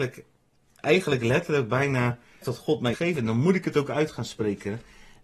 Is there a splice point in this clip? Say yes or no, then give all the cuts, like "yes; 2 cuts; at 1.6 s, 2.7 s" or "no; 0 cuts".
yes; 2 cuts; at 2.4 s, 2.9 s